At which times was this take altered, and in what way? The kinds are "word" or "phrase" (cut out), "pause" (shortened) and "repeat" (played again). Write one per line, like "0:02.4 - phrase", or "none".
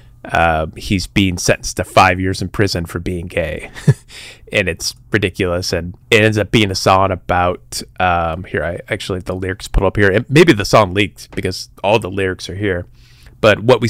0:06.0 - pause